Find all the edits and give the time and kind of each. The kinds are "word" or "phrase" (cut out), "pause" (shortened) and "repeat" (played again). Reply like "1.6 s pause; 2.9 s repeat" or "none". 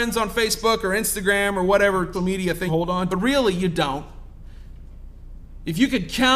2.1 s word; 2.7 s word; 3.1 s word